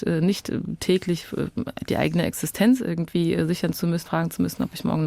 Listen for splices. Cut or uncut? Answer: cut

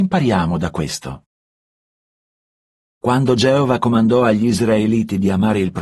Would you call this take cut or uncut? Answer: uncut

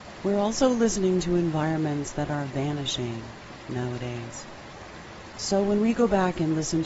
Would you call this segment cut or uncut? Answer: uncut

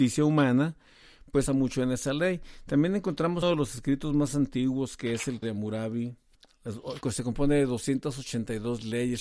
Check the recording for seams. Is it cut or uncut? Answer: cut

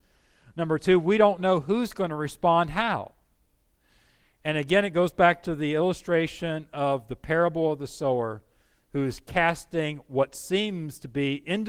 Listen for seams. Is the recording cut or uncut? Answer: uncut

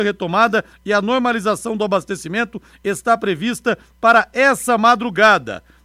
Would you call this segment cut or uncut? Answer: uncut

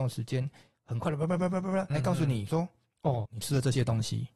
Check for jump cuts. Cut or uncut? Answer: cut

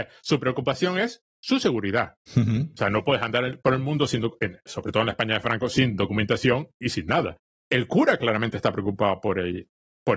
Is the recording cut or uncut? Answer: cut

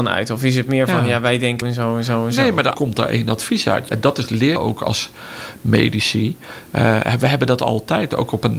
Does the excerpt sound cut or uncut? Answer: cut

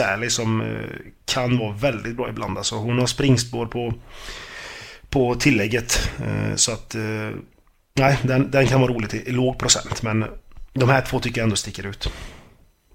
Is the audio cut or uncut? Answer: uncut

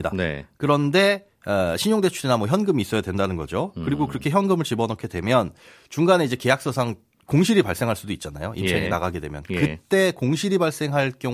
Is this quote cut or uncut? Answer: uncut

